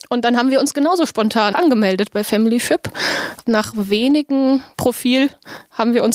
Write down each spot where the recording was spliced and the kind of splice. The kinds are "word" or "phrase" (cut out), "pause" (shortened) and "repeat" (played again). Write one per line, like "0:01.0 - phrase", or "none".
0:01.5 - word
0:03.4 - word
0:04.7 - word